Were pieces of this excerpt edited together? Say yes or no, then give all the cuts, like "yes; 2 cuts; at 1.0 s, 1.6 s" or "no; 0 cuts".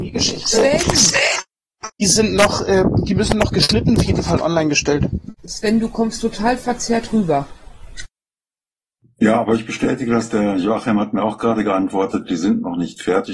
yes; 2 cuts; at 4.0 s, 5.4 s